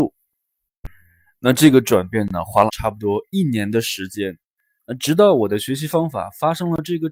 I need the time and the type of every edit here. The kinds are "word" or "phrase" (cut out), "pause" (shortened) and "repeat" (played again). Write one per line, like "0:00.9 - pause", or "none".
0:02.7 - word